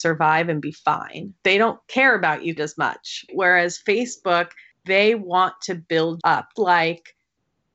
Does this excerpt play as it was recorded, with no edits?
no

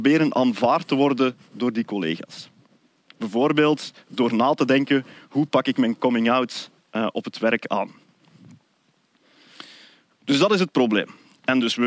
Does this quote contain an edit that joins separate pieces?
no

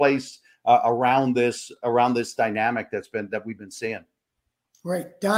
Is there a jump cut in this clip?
no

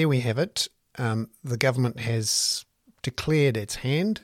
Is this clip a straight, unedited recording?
yes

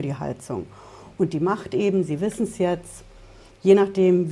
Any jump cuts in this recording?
no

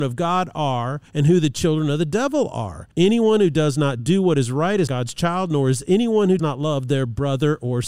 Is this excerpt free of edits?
no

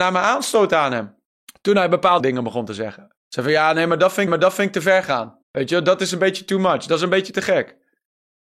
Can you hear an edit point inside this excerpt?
yes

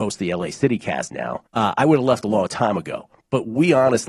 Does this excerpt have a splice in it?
yes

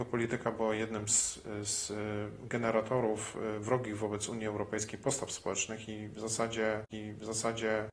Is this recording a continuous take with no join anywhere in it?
no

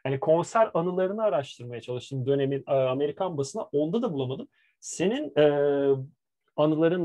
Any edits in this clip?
no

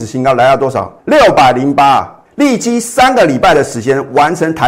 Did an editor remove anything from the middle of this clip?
yes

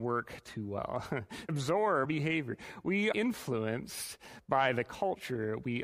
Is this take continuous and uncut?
no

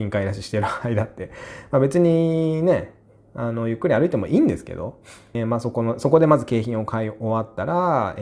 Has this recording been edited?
yes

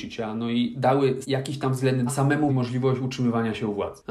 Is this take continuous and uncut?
no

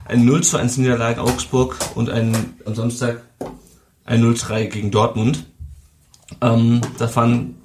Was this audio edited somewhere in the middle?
yes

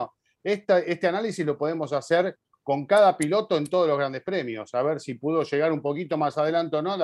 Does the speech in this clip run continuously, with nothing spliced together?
yes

